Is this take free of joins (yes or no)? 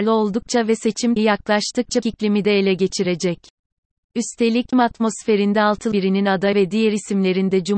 no